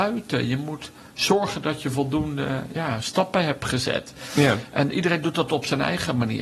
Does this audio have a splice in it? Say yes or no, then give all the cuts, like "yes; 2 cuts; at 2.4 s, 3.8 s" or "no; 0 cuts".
no; 0 cuts